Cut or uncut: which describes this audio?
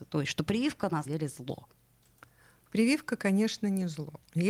cut